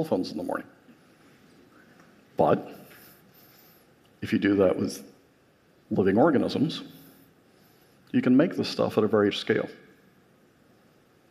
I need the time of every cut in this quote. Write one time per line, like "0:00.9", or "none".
0:09.3